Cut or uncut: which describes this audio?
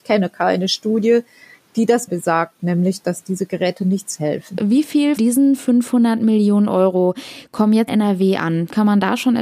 cut